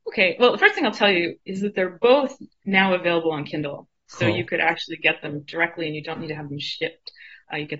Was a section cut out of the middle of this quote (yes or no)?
yes